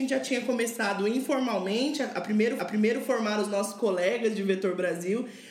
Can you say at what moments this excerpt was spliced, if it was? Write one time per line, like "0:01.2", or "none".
0:02.6